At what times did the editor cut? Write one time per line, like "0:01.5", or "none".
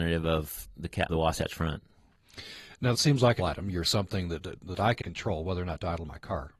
0:01.1
0:02.9
0:03.4
0:03.8
0:04.6
0:05.0